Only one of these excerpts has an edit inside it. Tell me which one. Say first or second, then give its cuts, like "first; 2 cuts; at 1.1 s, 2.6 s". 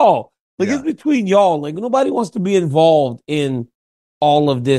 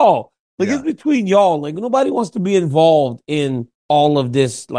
second; 1 cut; at 3.8 s